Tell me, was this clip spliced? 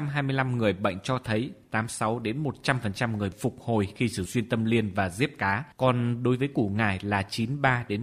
yes; 3 cuts; at 3.3 s, 4.3 s, 5.7 s

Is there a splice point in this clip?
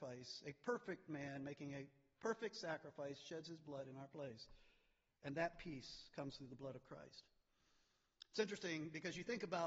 no; 0 cuts

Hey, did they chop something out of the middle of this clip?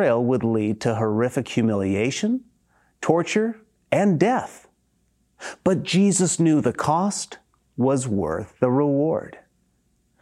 no; 0 cuts

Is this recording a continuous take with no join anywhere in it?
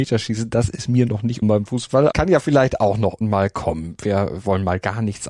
no; 3 cuts; at 1.4 s, 2.1 s, 3.2 s

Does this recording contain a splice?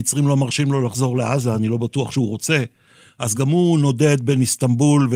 no; 0 cuts

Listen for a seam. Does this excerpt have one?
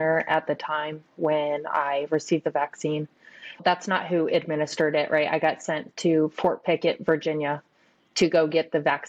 no; 0 cuts

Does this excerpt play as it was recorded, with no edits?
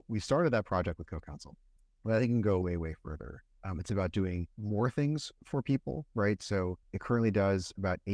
no; 4 cuts; at 1.8 s, 2.6 s, 4.5 s, 6.8 s

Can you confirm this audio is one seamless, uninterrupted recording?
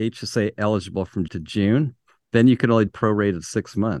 no; 2 cuts; at 1.3 s, 2.9 s

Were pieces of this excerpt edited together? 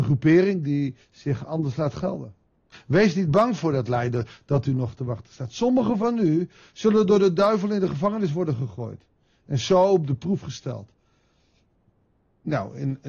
yes; 1 cut; at 1.0 s

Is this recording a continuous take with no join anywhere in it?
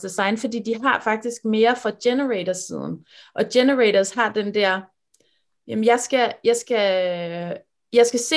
yes; 0 cuts

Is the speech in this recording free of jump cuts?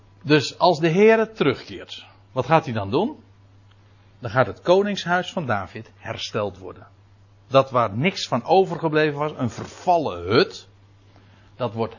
yes; 0 cuts

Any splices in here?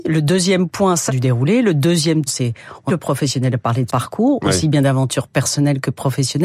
yes; 4 cuts; at 1.1 s, 2.3 s, 2.9 s, 3.9 s

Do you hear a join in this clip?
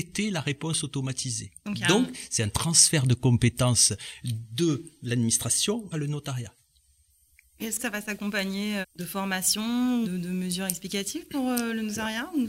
yes; 5 cuts; at 1.6 s, 5.9 s, 7.8 s, 8.8 s, 10.0 s

